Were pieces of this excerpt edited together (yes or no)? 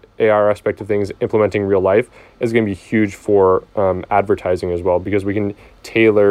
no